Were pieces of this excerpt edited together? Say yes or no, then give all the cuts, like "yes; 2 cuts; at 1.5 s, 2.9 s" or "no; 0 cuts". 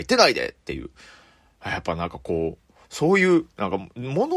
yes; 1 cut; at 2.8 s